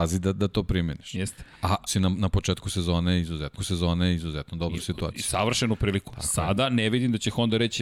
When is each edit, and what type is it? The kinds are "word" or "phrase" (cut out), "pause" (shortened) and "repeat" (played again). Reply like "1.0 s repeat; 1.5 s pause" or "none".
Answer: 1.9 s word; 3.6 s repeat